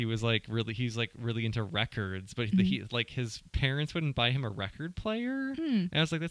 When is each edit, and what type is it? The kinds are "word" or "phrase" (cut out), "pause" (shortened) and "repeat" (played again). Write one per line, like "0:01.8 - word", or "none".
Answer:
0:03.5 - pause